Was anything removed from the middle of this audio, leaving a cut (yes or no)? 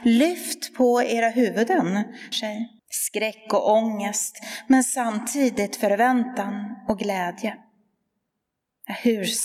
yes